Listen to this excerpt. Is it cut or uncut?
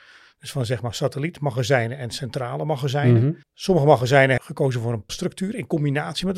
cut